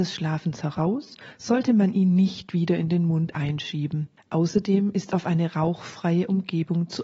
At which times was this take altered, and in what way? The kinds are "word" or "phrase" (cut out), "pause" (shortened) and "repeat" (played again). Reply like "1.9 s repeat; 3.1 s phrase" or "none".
4.2 s pause

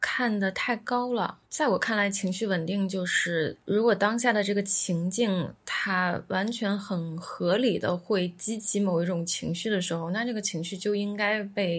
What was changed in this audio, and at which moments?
1.4 s pause

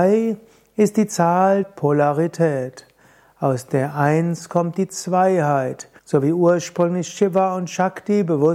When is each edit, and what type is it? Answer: 1.6 s word; 6.0 s pause

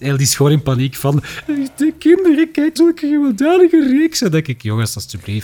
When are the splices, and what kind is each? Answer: 2.0 s word; 2.8 s word

